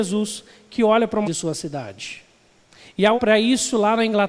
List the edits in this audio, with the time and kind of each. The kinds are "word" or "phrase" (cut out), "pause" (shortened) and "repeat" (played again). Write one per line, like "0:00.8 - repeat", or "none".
0:01.2 - word
0:03.2 - word